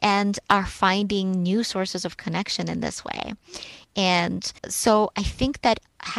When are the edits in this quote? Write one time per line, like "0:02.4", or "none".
0:04.6